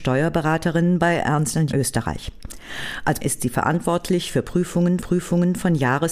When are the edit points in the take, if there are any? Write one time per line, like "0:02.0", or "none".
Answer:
0:01.7
0:03.2
0:05.0